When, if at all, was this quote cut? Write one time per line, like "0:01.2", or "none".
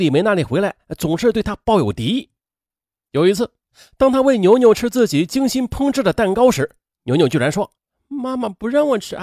0:07.8